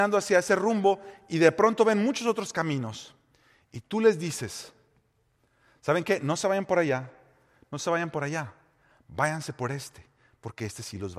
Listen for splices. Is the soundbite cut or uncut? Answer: uncut